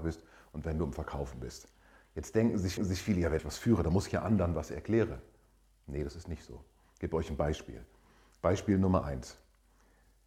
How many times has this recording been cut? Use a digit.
2